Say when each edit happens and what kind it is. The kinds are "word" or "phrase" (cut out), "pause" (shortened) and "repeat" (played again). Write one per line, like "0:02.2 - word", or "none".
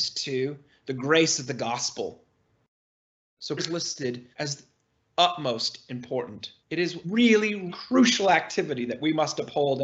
0:03.6 - word
0:04.3 - pause
0:06.6 - pause
0:07.0 - word
0:07.7 - word